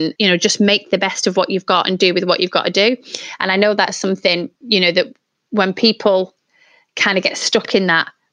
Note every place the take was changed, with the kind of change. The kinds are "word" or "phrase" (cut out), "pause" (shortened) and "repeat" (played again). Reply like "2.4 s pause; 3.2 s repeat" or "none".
none